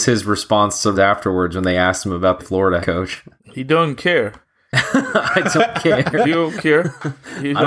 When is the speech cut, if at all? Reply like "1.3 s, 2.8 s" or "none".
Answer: 0.9 s, 2.4 s, 2.8 s, 4.4 s